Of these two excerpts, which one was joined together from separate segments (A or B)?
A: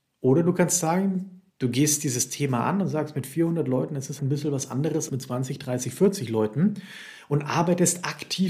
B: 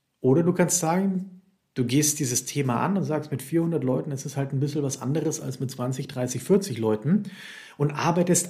A